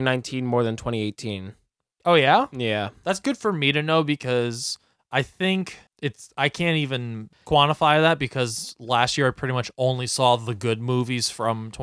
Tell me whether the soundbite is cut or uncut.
uncut